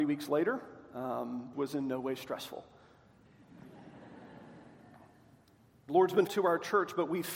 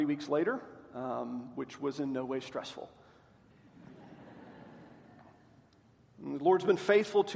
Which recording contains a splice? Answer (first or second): first